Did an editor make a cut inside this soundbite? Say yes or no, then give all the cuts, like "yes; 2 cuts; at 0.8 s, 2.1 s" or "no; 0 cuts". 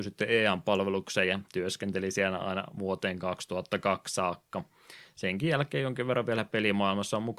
no; 0 cuts